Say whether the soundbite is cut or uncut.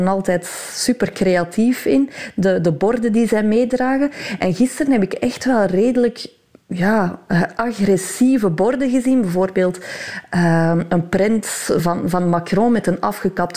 uncut